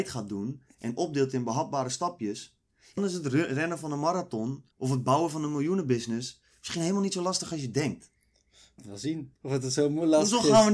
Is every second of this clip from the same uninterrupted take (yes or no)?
no